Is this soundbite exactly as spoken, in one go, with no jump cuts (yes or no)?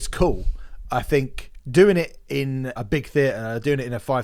no